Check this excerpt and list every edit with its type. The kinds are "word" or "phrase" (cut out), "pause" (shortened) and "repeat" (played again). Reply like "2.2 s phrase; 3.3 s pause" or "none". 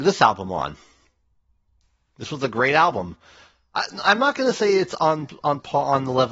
none